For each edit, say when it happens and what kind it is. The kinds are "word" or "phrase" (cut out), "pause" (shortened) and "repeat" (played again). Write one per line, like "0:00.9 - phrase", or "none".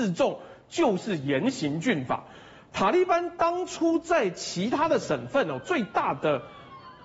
none